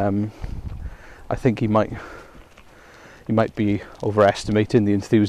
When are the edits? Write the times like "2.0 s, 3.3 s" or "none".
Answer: none